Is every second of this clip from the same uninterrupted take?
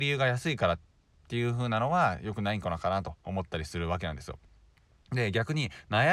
yes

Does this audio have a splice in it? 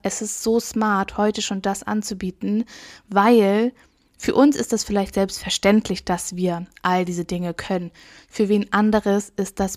no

